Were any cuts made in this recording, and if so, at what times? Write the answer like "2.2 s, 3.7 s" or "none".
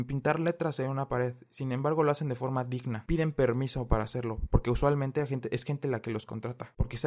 none